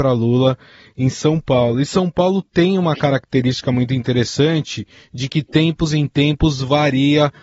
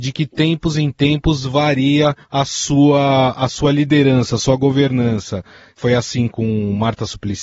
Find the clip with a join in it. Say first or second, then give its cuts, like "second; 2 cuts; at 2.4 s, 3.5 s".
second; 1 cut; at 2.2 s